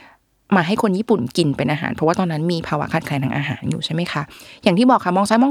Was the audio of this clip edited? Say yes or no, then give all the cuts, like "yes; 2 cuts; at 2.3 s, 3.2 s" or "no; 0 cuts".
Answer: no; 0 cuts